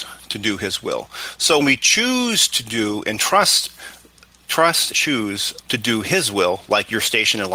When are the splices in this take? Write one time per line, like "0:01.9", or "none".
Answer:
0:01.6
0:04.9
0:05.6